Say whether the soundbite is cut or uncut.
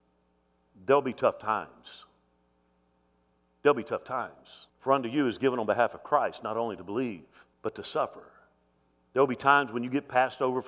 cut